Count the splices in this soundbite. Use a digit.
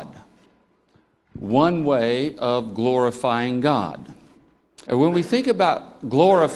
1